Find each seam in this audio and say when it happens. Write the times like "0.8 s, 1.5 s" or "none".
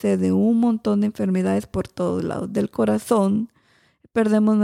none